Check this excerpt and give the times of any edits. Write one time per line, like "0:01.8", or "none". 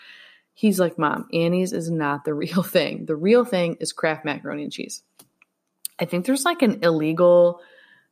none